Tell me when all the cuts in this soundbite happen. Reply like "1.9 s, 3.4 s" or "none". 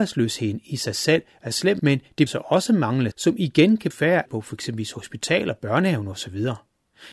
1.8 s, 2.3 s, 3.1 s, 3.9 s, 4.3 s

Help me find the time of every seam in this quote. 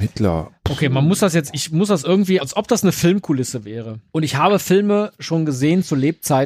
2.4 s, 4.1 s

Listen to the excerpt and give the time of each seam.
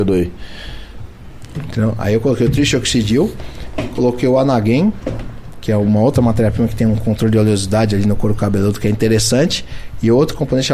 none

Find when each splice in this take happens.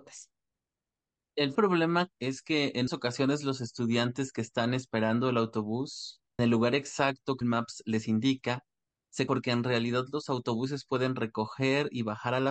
1.6 s, 2.1 s, 2.9 s, 6.4 s, 7.4 s, 9.3 s

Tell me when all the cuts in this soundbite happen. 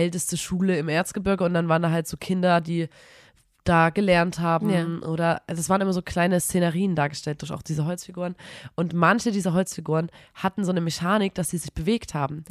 none

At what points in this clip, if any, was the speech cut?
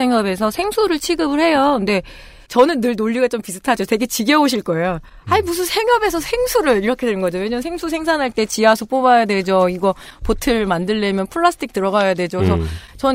none

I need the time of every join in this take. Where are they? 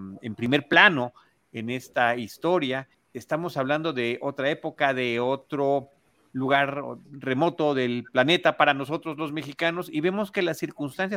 2.9 s

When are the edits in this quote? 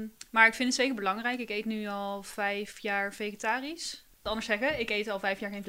4.1 s

